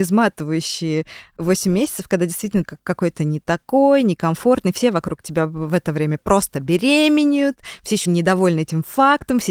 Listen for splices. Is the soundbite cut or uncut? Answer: cut